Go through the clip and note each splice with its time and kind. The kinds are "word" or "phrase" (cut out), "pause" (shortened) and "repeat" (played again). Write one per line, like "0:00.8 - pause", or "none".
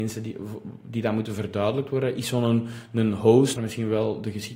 0:03.6 - word

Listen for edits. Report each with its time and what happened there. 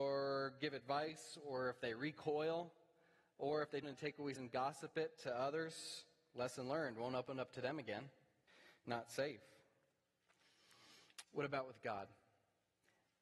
0:03.8 - phrase
0:04.4 - word
0:08.5 - pause

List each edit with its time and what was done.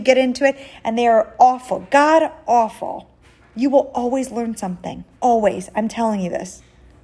0:03.4 - pause
0:05.1 - pause

